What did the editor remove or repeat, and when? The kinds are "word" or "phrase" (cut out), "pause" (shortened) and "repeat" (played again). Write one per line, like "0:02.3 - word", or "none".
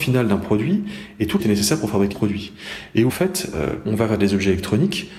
0:01.4 - phrase
0:02.1 - word
0:03.1 - phrase
0:03.8 - word